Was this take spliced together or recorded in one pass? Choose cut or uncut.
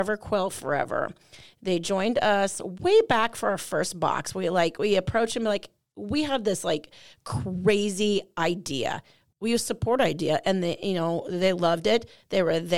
uncut